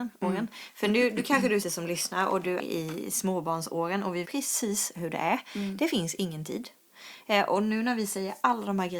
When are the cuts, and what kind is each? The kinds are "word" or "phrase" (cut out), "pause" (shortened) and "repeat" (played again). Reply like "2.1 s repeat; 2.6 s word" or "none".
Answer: 1.6 s word; 2.6 s word; 4.2 s word